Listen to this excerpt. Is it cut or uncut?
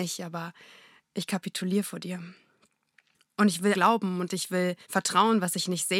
cut